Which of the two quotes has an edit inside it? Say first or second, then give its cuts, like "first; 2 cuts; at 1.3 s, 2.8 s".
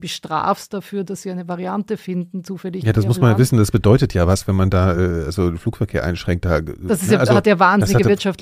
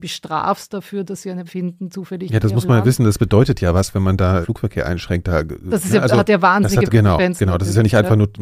second; 3 cuts; at 1.5 s, 4.4 s, 6.9 s